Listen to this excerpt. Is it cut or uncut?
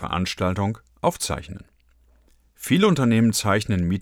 uncut